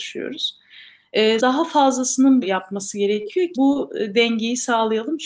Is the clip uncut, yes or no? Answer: no